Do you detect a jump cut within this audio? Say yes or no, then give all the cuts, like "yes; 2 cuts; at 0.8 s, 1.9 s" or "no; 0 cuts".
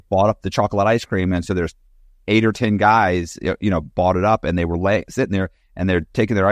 no; 0 cuts